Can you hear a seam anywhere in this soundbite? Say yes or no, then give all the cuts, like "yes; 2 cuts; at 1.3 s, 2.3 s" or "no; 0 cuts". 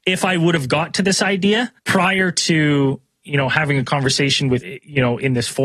yes; 2 cuts; at 1.8 s, 4.6 s